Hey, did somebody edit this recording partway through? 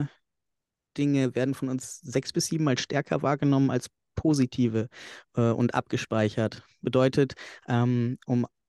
no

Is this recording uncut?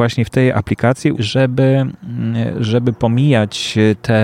no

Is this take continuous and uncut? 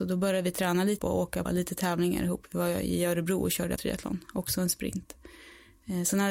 no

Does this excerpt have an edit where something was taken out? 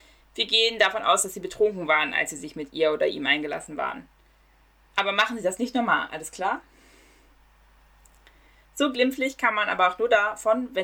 no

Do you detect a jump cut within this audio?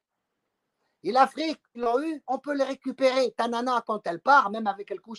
yes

